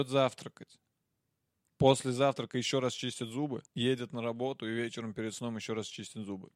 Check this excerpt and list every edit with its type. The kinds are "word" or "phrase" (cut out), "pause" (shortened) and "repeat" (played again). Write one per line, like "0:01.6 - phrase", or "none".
0:03.7 - pause